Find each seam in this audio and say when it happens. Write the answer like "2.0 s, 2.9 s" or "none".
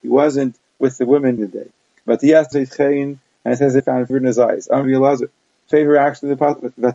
1.4 s, 2.5 s, 3.8 s, 4.1 s, 4.8 s, 5.7 s